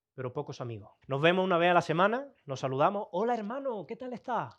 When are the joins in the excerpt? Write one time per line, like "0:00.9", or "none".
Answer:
0:01.0